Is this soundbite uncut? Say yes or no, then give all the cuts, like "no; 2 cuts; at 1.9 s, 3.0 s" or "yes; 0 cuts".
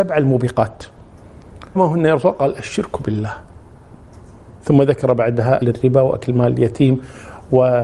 no; 2 cuts; at 1.7 s, 5.6 s